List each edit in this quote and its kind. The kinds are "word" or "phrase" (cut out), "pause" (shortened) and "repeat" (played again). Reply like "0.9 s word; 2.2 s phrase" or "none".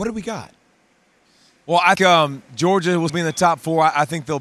1.2 s pause; 1.9 s word; 3.1 s word